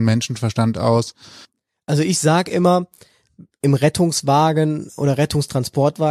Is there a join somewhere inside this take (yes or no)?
no